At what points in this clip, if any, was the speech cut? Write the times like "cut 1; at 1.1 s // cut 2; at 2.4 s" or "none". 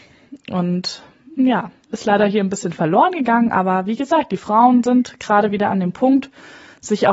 none